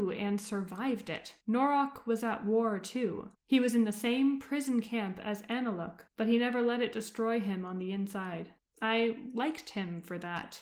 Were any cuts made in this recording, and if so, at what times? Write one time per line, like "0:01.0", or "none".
0:01.4
0:03.3
0:06.1
0:08.6

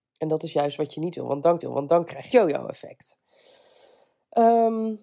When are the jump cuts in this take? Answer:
0:01.6
0:02.3

